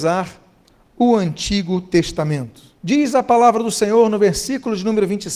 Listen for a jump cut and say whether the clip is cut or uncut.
cut